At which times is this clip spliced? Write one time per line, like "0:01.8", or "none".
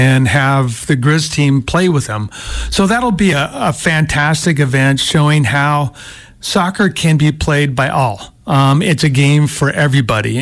none

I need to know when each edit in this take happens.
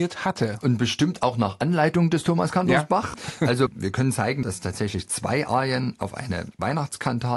none

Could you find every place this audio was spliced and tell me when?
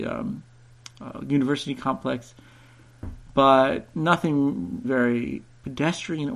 0:04.8

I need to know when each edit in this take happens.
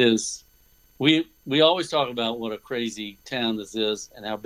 none

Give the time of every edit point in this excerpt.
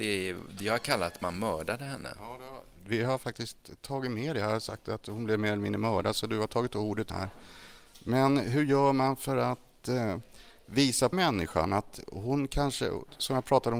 0:07.1
0:11.1

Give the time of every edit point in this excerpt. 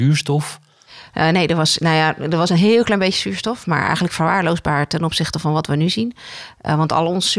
none

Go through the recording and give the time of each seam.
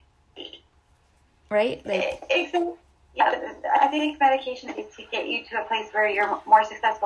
0:04.8

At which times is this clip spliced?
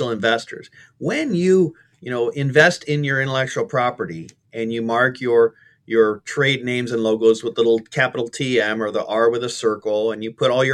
none

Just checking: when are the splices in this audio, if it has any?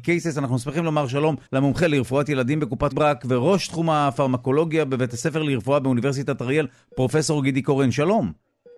0:01.5
0:02.9

